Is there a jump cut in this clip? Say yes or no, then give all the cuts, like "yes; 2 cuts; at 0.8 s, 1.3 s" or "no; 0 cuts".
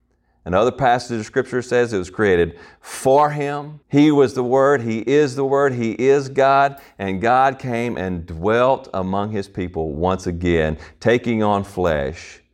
yes; 1 cut; at 3.8 s